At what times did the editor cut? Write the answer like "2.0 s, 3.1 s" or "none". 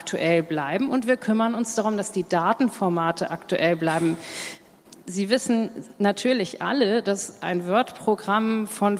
5.0 s